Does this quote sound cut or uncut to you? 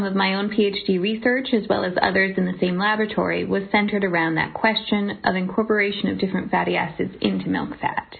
uncut